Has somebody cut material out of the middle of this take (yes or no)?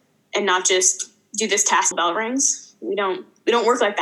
yes